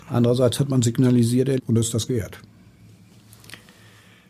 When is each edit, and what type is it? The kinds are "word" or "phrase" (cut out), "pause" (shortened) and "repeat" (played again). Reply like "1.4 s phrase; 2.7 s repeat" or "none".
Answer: 1.6 s word; 2.1 s word